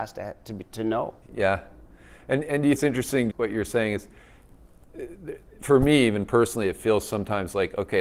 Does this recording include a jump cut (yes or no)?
yes